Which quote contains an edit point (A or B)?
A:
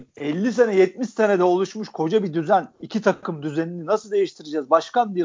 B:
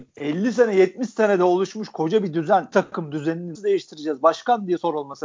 B